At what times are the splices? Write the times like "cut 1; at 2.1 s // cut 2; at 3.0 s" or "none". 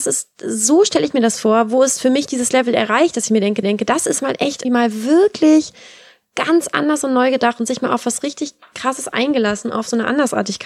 cut 1; at 3.6 s // cut 2; at 4.6 s